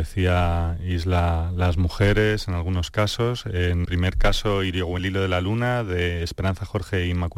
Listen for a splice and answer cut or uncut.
cut